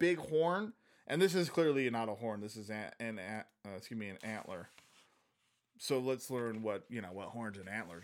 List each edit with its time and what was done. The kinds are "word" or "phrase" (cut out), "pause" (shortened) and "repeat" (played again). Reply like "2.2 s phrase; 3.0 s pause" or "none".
none